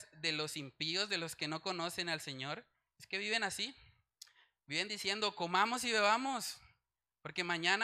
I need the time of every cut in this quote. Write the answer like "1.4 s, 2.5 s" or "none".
none